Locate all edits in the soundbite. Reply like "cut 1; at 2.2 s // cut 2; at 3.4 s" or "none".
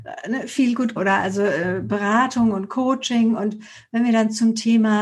cut 1; at 1.0 s